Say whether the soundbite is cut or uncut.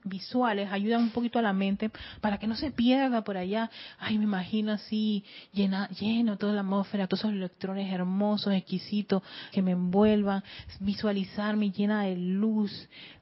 cut